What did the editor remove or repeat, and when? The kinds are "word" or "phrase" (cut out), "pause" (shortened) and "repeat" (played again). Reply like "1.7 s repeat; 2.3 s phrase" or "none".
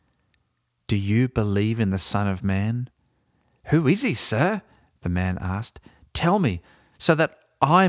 none